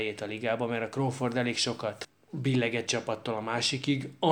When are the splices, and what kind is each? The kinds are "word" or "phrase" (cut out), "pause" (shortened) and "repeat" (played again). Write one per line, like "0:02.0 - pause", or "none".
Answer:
0:02.9 - word